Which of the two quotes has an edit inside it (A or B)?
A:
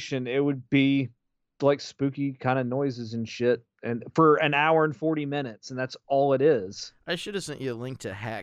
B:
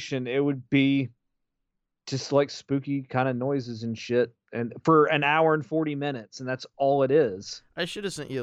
A